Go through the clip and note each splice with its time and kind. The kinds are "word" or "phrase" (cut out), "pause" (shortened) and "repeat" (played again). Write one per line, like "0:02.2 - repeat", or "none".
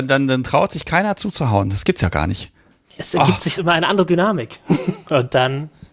0:03.0 - word
0:03.5 - word